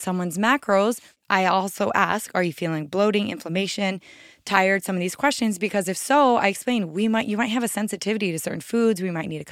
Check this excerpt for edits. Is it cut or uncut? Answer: uncut